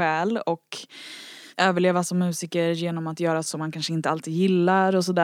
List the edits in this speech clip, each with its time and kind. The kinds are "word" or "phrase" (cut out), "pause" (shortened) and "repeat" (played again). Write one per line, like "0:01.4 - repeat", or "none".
0:01.5 - pause
0:03.4 - word